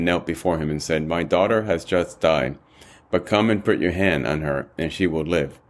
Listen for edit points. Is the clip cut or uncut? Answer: uncut